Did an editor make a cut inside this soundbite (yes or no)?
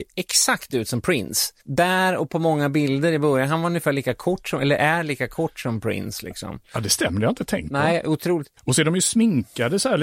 yes